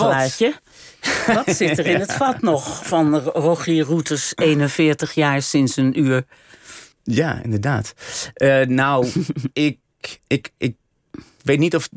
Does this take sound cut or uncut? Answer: cut